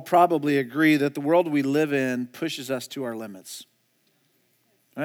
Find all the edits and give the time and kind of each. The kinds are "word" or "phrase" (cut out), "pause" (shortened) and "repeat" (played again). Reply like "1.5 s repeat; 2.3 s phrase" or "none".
none

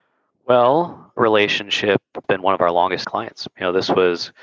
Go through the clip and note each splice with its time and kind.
1.2 s word; 2.2 s word; 3.0 s word

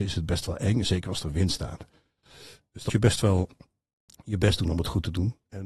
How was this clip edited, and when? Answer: 2.9 s word

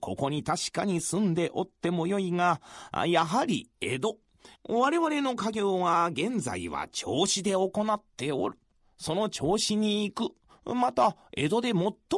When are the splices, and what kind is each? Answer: 4.6 s pause

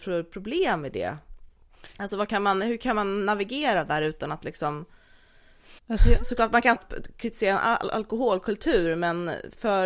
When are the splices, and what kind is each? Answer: 5.8 s pause; 6.8 s word

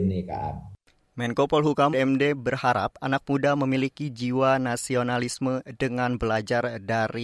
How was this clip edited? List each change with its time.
1.9 s word

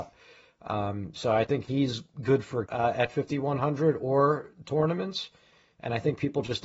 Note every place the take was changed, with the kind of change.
2.7 s word

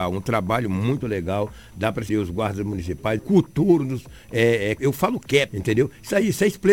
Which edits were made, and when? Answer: 2.1 s word; 3.2 s word; 4.8 s word; 5.5 s phrase

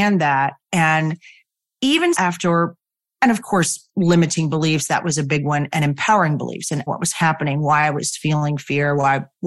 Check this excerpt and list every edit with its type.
2.1 s word; 6.9 s word

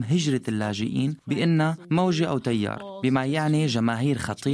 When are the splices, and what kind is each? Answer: none

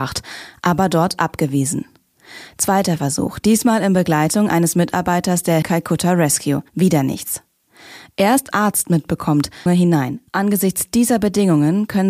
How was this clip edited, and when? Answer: 5.6 s word; 6.7 s pause; 8.5 s phrase; 9.7 s phrase; 10.3 s pause

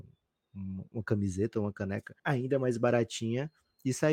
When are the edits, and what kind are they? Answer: 2.2 s pause

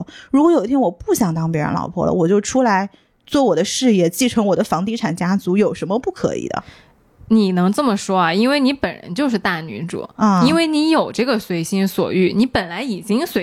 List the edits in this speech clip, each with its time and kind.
none

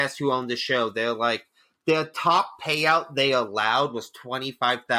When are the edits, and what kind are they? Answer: none

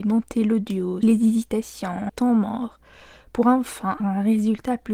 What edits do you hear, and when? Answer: 1.0 s word; 2.1 s word; 4.0 s word

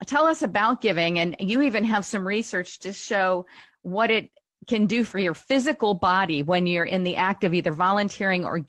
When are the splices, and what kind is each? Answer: none

